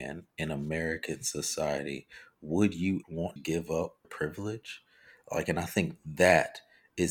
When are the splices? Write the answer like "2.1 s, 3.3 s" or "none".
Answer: 3.0 s, 3.4 s, 4.0 s